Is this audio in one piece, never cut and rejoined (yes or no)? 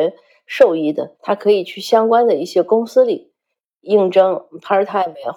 no